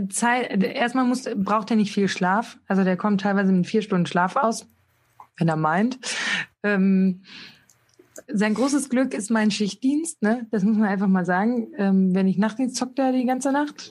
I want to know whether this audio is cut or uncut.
cut